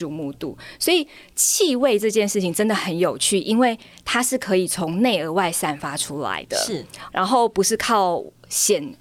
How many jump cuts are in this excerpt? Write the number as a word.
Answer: one